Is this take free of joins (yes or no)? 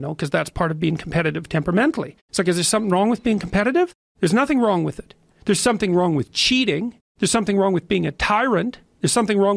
yes